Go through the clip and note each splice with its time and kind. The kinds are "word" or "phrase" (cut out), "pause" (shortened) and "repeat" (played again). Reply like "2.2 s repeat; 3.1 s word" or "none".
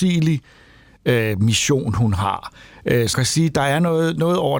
3.1 s word